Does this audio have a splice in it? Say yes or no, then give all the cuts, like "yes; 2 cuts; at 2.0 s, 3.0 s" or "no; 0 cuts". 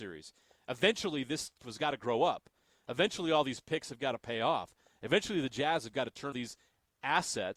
yes; 2 cuts; at 1.6 s, 6.3 s